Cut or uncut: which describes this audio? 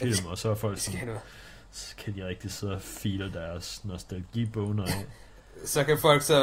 uncut